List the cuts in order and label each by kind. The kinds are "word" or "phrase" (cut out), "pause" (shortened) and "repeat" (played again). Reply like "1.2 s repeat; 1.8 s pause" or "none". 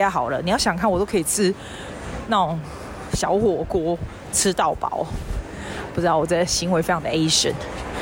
none